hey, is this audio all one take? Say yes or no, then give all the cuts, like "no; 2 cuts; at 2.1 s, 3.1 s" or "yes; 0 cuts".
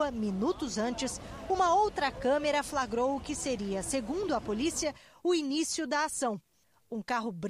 yes; 0 cuts